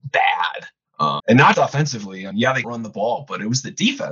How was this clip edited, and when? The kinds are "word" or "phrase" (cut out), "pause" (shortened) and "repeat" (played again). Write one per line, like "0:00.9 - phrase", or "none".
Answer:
0:01.2 - word
0:01.5 - word
0:02.3 - word
0:02.6 - word